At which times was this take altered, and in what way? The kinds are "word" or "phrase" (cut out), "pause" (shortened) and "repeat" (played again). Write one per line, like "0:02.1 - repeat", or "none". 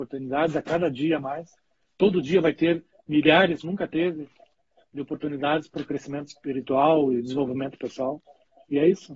0:03.6 - word